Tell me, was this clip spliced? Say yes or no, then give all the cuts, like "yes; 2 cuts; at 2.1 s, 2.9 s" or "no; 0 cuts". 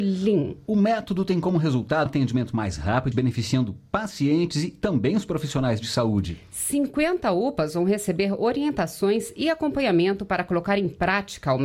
yes; 2 cuts; at 2.1 s, 3.1 s